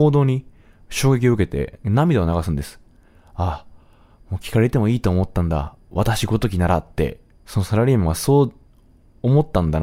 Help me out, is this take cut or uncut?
uncut